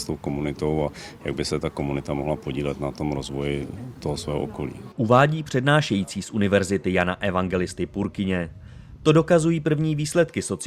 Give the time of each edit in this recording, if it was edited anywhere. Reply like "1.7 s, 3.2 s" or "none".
none

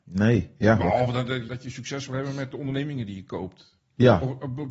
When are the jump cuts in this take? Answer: 1.5 s

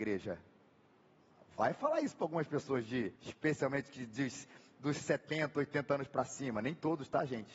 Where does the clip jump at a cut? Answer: 3.2 s

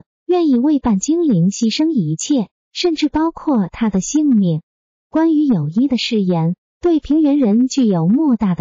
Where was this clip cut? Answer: none

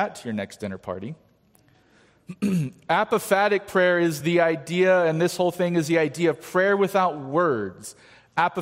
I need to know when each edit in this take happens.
none

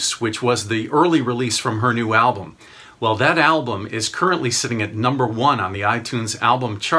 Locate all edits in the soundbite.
none

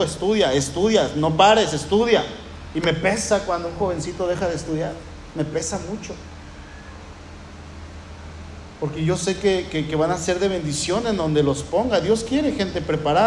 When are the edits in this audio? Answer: none

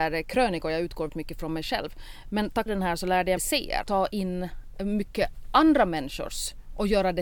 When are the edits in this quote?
1.1 s, 2.7 s, 3.4 s, 3.8 s

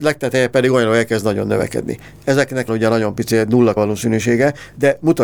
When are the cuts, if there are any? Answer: 2.7 s, 3.8 s

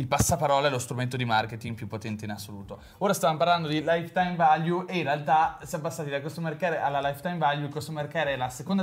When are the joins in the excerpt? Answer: none

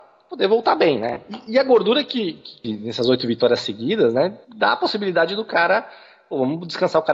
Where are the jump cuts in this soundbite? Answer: 2.6 s, 4.4 s

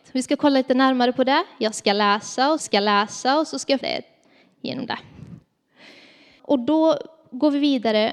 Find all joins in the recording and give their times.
2.6 s, 3.8 s

